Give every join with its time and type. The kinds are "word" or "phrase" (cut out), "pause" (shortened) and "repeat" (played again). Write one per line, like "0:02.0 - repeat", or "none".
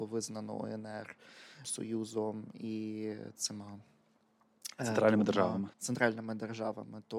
0:01.6 - word
0:05.7 - pause